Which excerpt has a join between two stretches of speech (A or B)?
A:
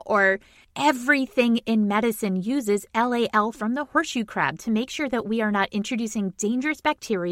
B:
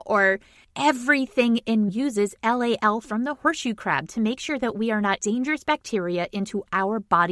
B